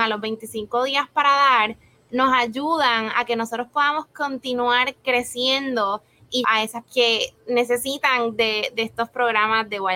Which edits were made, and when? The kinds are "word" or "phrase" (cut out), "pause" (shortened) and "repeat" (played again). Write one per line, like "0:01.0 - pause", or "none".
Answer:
0:06.4 - word
0:06.8 - word